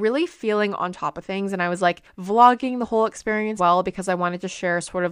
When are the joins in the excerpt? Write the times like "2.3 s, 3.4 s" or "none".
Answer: 3.6 s